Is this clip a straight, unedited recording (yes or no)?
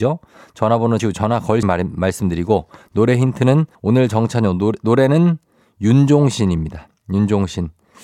no